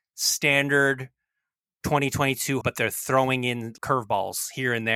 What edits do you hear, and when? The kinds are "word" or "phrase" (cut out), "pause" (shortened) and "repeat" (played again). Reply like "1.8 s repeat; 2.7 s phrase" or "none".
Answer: 2.6 s word; 3.8 s word